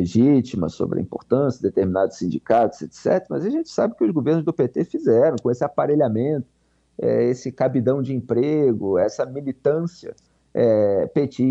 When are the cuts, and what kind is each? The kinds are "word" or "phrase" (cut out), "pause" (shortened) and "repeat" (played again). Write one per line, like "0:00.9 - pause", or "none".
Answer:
none